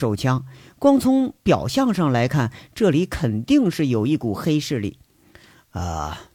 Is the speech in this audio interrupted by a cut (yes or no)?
yes